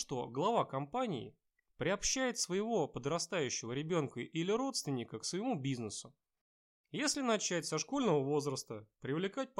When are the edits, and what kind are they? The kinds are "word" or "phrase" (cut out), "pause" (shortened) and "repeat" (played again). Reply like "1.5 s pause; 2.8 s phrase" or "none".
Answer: none